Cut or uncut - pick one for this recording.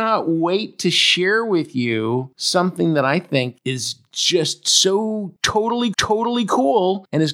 cut